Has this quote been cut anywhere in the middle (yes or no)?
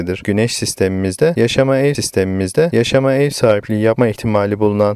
yes